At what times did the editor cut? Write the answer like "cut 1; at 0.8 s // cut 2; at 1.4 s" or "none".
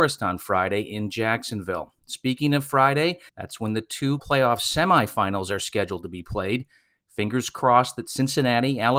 cut 1; at 3.3 s // cut 2; at 4.2 s